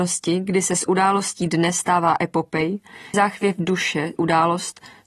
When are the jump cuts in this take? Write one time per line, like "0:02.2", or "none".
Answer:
0:03.1
0:04.2